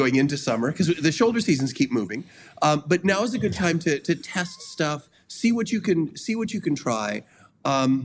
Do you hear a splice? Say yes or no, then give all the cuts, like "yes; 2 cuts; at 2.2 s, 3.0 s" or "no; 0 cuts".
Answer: no; 0 cuts